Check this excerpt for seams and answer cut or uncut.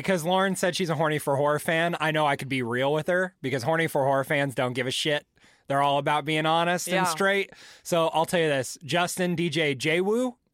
uncut